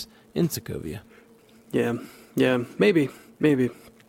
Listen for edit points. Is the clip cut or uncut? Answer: cut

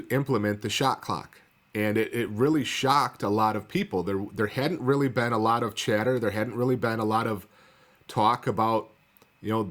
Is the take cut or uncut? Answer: uncut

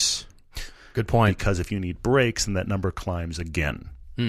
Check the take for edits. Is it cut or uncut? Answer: uncut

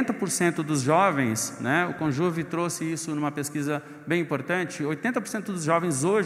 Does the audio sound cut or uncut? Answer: uncut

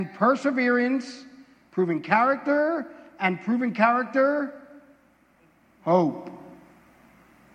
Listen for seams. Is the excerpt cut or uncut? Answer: uncut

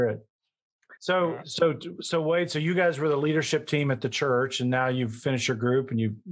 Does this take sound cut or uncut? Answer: cut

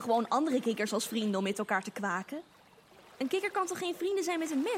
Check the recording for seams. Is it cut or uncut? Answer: uncut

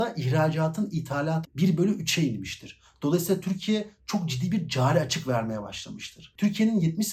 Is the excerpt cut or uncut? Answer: cut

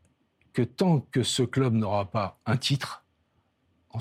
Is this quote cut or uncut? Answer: uncut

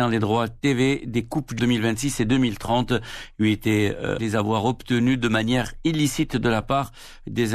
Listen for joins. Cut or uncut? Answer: cut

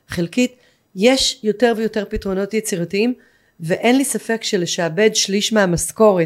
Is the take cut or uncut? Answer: uncut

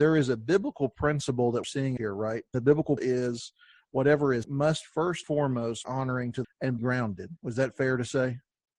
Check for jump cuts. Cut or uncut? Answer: cut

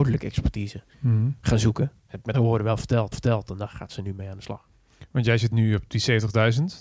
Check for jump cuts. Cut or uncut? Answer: cut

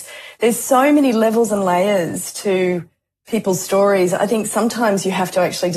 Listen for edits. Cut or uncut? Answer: uncut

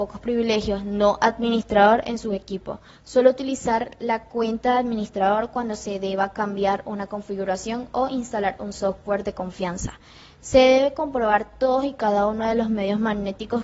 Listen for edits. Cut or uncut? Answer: uncut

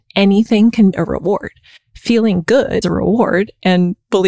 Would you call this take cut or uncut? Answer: cut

